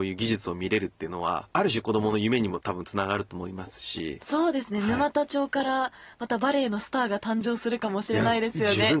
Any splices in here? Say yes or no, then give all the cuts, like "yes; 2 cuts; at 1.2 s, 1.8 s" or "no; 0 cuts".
yes; 1 cut; at 1.5 s